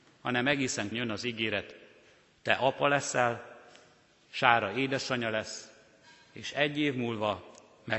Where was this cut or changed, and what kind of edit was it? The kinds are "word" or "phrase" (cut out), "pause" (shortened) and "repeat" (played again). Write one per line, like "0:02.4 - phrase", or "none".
0:00.9 - word